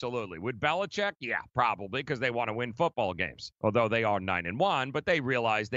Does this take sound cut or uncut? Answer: cut